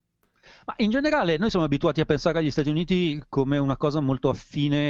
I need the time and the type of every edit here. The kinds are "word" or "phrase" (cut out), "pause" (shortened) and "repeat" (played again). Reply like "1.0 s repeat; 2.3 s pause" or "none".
none